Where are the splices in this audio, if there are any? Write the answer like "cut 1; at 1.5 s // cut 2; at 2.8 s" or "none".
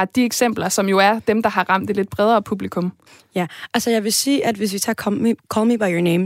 none